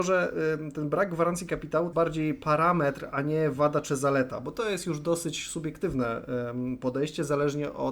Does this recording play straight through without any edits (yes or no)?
no